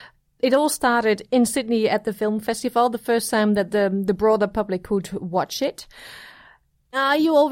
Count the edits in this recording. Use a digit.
0